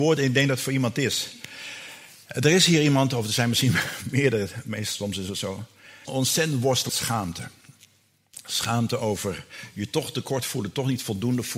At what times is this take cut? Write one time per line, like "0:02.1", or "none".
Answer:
0:06.0
0:06.9